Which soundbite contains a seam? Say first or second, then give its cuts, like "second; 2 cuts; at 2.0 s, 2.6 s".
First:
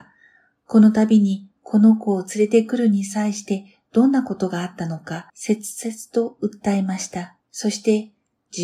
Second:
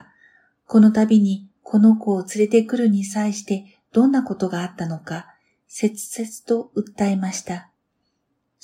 first; 2 cuts; at 5.3 s, 7.4 s